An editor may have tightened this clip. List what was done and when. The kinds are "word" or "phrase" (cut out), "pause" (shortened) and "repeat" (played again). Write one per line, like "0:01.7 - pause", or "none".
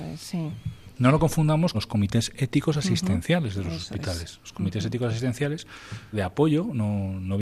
0:01.7 - word
0:06.1 - phrase